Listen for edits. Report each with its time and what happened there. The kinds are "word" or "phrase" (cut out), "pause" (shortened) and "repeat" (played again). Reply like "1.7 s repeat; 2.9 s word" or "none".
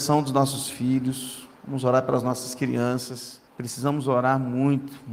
1.6 s pause; 3.5 s pause